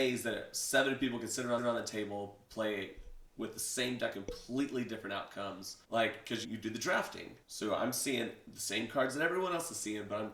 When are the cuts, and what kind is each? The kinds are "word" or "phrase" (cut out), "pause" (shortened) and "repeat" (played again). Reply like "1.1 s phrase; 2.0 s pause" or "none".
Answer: 1.6 s repeat; 4.1 s phrase; 5.8 s pause; 6.4 s word; 7.4 s pause